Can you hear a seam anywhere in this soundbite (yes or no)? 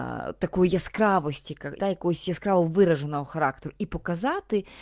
yes